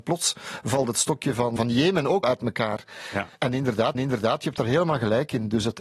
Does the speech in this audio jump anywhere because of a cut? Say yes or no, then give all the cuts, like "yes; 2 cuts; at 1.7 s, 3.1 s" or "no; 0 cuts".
yes; 4 cuts; at 1.6 s, 2.2 s, 3.4 s, 3.9 s